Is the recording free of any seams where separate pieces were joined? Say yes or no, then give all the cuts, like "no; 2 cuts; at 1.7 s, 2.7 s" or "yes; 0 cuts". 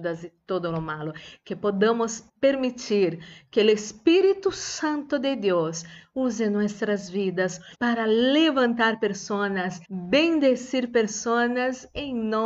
no; 3 cuts; at 2.3 s, 7.7 s, 9.8 s